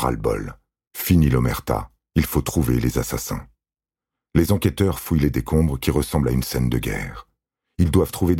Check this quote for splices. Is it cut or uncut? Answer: uncut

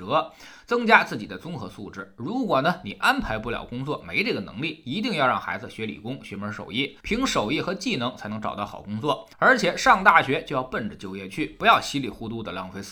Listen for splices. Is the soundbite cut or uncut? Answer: cut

